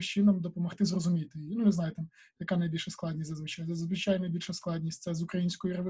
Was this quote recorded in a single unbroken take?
yes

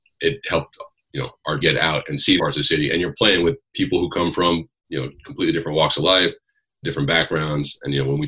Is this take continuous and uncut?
no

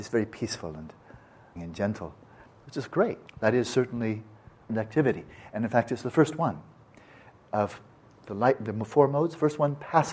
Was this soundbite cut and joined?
yes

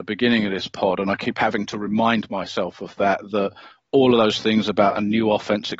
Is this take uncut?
yes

